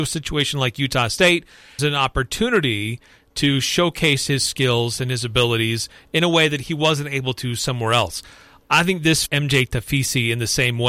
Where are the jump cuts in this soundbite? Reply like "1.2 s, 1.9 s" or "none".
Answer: 1.8 s, 9.3 s